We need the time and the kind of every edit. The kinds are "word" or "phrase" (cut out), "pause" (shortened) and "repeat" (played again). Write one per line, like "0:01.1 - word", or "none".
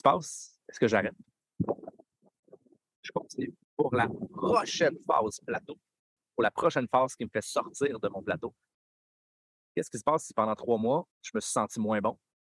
0:03.6 - pause
0:11.1 - pause